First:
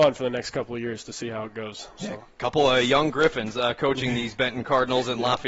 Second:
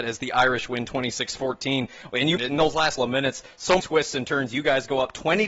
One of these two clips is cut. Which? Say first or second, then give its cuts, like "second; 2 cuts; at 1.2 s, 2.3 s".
second; 3 cuts; at 2.4 s, 3.0 s, 3.8 s